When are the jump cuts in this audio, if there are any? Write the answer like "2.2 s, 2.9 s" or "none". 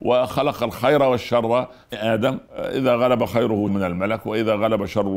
1.9 s, 2.5 s, 3.7 s